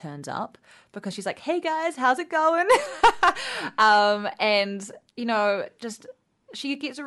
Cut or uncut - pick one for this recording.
uncut